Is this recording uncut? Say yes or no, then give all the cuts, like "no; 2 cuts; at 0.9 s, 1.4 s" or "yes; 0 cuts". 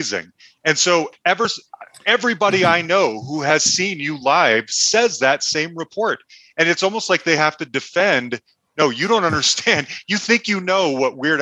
yes; 0 cuts